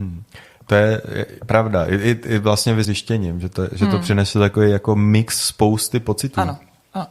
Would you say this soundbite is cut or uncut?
cut